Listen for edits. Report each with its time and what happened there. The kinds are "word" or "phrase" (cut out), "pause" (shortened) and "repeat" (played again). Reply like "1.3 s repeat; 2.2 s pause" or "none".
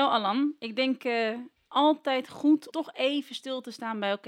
1.6 s pause; 2.7 s word